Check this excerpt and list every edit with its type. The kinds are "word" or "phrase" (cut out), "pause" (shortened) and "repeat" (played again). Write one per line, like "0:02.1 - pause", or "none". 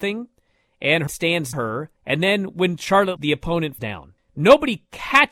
0:01.1 - word
0:01.5 - word
0:02.0 - pause
0:03.2 - word
0:03.8 - word
0:04.2 - pause

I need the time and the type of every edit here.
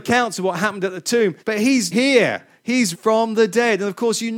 0:01.4 - pause
0:01.9 - word
0:02.9 - word

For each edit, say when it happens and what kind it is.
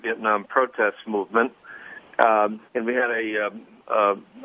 0:02.7 - pause

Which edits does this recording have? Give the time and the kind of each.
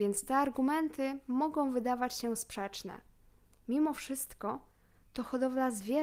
none

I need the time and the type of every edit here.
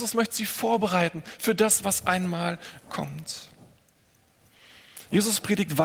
none

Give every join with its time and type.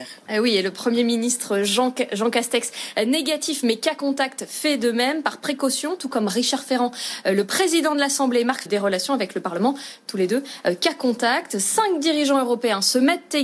0:08.7 - phrase

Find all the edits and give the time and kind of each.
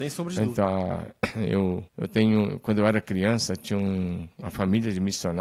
0:01.9 - pause

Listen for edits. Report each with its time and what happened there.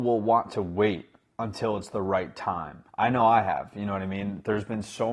0:02.9 - pause

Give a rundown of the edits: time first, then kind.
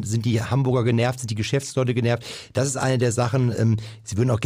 none

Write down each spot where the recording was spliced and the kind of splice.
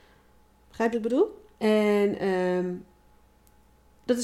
0:00.9 - phrase
0:01.5 - pause

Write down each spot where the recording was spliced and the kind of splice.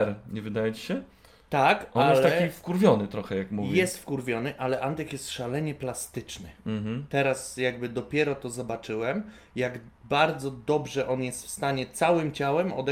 none

